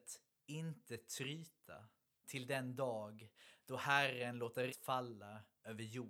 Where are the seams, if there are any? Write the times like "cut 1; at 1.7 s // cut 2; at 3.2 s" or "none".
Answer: cut 1; at 2.2 s // cut 2; at 4.7 s